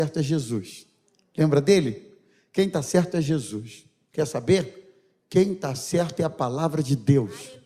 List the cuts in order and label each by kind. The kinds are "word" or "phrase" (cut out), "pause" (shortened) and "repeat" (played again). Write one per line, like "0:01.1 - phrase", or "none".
none